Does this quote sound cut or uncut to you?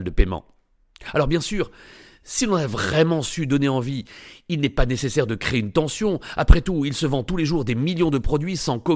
uncut